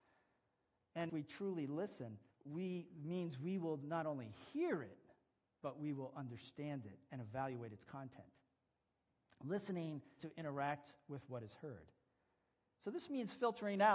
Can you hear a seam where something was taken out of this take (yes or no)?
yes